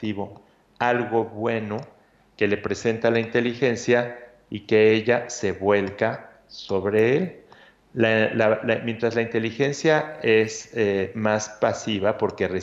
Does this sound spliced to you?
no; 0 cuts

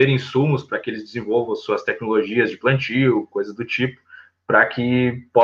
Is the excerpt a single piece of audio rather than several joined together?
yes; 0 cuts

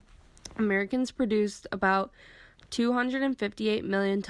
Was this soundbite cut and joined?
no; 0 cuts

